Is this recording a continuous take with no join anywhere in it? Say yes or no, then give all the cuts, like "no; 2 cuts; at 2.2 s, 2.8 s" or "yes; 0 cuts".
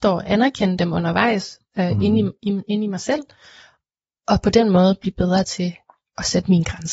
yes; 0 cuts